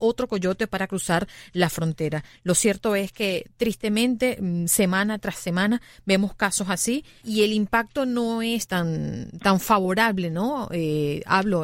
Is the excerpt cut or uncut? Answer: cut